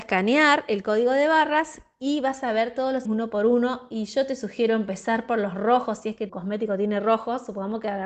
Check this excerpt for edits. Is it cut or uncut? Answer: cut